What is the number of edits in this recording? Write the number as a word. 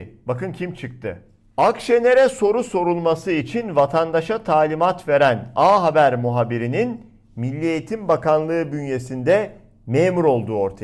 zero